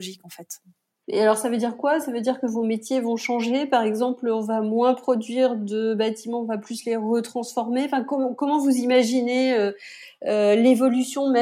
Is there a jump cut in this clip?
no; 0 cuts

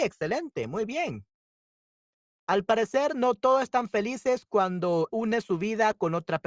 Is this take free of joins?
no; 1 cut; at 5.1 s

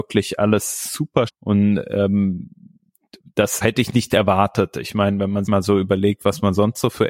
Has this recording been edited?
yes; 3 cuts; at 1.3 s, 3.6 s, 5.5 s

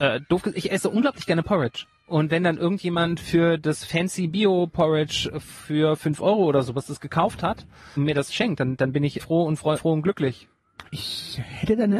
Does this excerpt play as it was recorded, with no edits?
no; 4 cuts; at 8.0 s, 9.2 s, 9.8 s, 10.9 s

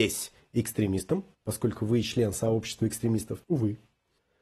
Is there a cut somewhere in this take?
yes; 2 cuts; at 1.3 s, 3.4 s

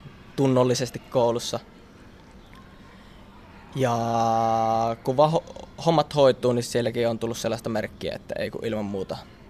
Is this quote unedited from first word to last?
yes; 0 cuts

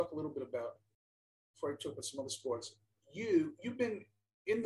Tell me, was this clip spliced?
no; 0 cuts

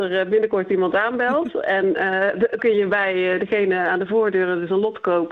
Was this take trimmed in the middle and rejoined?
yes; 1 cut; at 2.6 s

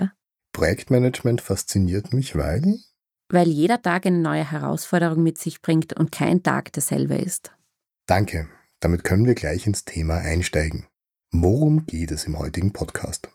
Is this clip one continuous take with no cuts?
yes; 0 cuts

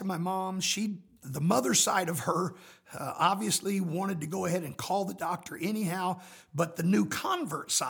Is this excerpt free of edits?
no; 1 cut; at 1.2 s

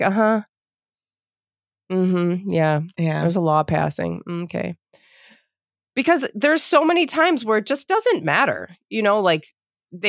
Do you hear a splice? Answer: no; 0 cuts

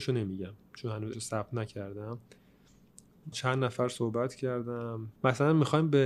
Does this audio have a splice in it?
yes; 3 cuts; at 1.1 s, 3.3 s, 5.2 s

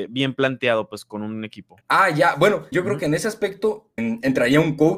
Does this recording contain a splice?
yes; 3 cuts; at 1.8 s, 2.7 s, 4.0 s

